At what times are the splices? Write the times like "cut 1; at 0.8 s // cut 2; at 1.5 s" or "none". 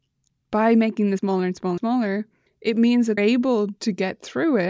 cut 1; at 1.2 s // cut 2; at 1.8 s // cut 3; at 3.2 s